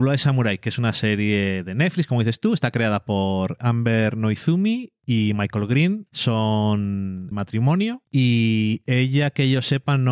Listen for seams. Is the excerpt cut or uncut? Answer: cut